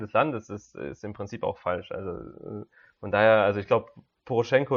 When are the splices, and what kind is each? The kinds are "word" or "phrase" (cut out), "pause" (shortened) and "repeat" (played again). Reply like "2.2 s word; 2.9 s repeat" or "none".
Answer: none